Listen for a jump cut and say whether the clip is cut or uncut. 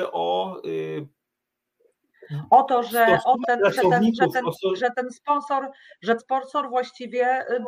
cut